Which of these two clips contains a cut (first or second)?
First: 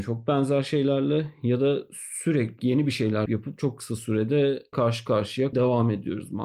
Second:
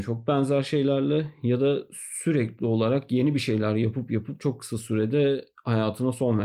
first